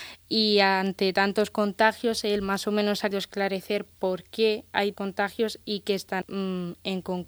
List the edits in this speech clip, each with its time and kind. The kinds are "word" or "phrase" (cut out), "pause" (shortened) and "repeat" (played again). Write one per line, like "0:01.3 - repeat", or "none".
0:03.1 - word
0:04.9 - word
0:06.2 - word